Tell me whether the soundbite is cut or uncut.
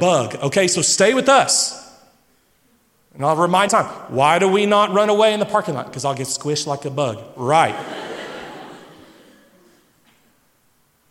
cut